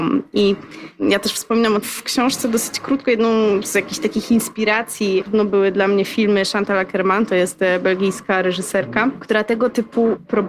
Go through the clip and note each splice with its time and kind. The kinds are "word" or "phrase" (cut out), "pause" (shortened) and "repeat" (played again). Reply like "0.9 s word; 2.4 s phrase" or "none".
1.8 s word; 5.2 s word